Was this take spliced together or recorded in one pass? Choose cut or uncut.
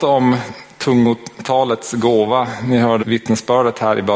cut